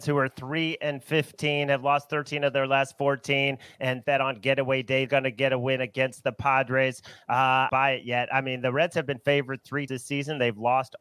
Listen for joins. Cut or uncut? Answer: cut